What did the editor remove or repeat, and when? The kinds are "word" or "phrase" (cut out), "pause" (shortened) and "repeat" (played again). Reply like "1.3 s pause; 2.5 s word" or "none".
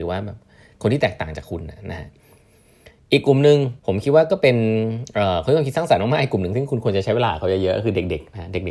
3.8 s pause